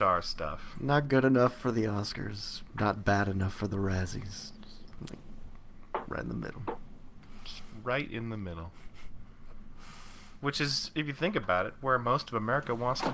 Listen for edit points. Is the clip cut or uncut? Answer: uncut